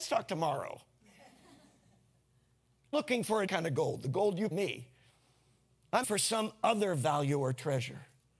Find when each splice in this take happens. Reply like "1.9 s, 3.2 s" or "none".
2.9 s, 3.5 s, 4.5 s, 6.0 s